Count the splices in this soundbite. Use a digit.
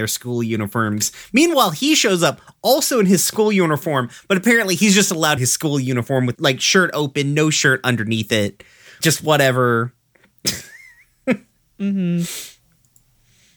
3